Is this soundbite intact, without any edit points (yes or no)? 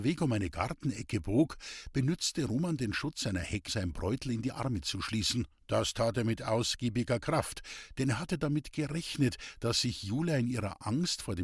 no